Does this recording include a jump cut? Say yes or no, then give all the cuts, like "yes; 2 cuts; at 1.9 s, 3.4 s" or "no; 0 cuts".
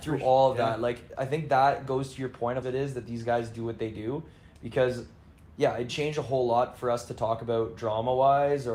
yes; 2 cuts; at 2.6 s, 5.9 s